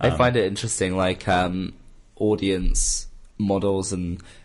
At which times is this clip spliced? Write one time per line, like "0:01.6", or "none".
0:03.3